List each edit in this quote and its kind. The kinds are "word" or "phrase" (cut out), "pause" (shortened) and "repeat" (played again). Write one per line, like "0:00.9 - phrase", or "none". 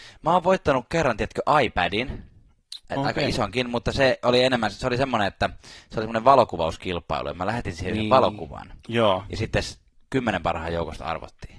0:02.8 - pause